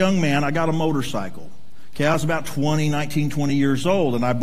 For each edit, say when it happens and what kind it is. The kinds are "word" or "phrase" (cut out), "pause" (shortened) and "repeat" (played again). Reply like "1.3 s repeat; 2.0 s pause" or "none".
none